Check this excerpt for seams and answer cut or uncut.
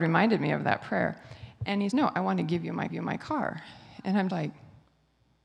cut